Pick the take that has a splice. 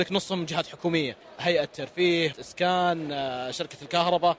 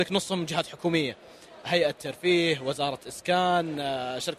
first; 2 cuts; at 1.2 s, 2.3 s

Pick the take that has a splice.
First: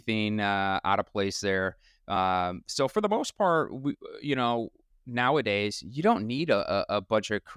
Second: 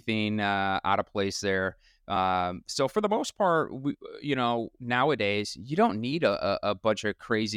second; 1 cut; at 4.7 s

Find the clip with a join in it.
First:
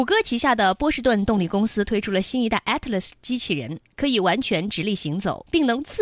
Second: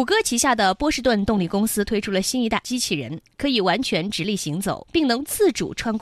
second; 1 cut; at 2.6 s

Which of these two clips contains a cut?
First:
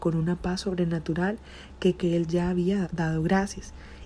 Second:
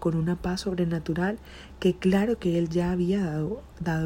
first; 2 cuts; at 2.0 s, 2.8 s

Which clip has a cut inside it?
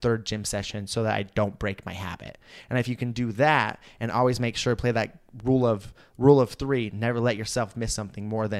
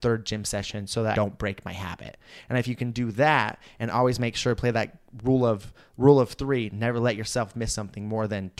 second; 1 cut; at 1.1 s

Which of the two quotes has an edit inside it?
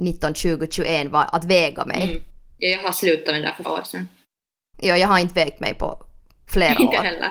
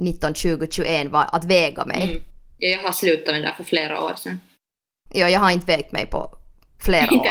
first; 1 cut; at 3.6 s

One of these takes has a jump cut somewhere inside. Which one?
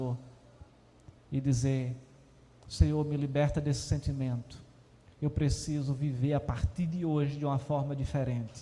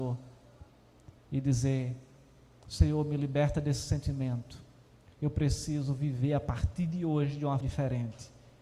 second; 1 cut; at 7.6 s

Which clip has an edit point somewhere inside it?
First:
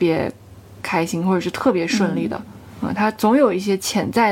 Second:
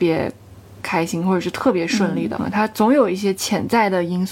second; 1 cut; at 2.4 s

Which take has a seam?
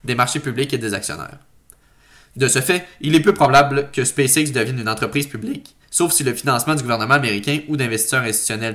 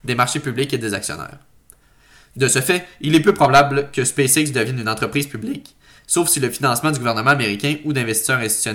first; 1 cut; at 5.8 s

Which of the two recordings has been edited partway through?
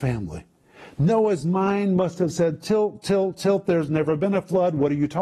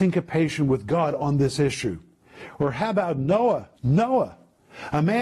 second; 1 cut; at 3.7 s

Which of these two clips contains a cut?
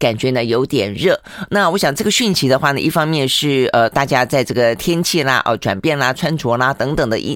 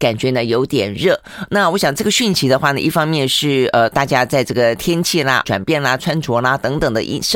second; 1 cut; at 5.4 s

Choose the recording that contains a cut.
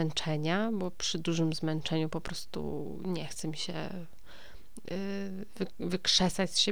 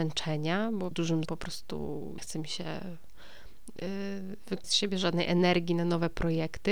second; 4 cuts; at 0.9 s, 1.2 s, 2.2 s, 4.6 s

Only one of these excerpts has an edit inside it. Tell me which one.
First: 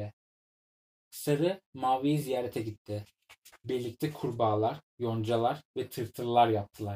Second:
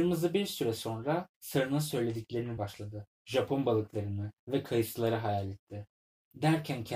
second; 4 cuts; at 1.3 s, 2.6 s, 3.1 s, 4.4 s

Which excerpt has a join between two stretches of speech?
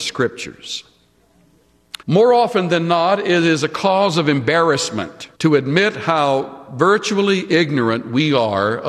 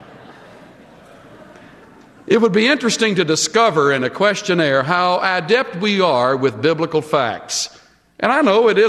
first; 2 cuts; at 2.0 s, 5.3 s

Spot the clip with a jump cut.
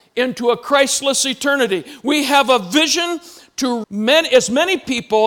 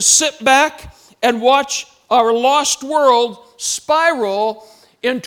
first; 1 cut; at 3.8 s

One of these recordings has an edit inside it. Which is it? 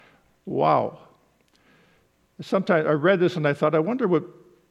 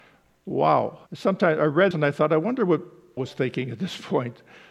second; 3 cuts; at 1.1 s, 1.9 s, 3.2 s

